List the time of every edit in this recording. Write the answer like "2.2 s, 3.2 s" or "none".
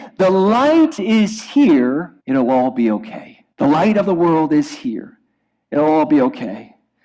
2.2 s, 3.5 s